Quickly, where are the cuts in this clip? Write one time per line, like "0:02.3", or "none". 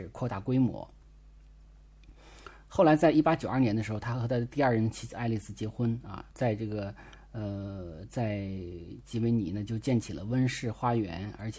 0:06.3